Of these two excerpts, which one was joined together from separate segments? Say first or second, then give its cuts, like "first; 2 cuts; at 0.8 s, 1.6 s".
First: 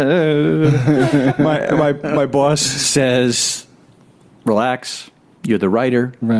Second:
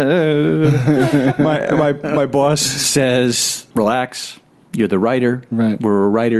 second; 1 cut; at 3.7 s